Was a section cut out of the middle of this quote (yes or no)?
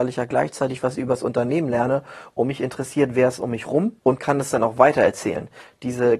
yes